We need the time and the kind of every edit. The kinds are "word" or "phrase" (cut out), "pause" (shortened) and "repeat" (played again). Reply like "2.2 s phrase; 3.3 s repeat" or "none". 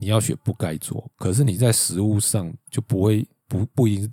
2.7 s pause